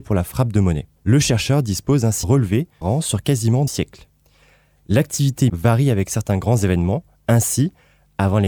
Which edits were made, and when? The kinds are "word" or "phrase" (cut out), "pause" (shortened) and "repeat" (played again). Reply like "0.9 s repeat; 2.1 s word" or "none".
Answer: 1.0 s pause; 2.2 s word; 2.8 s phrase; 3.7 s word; 5.5 s word